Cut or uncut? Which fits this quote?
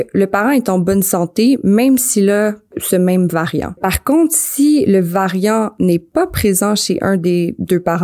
uncut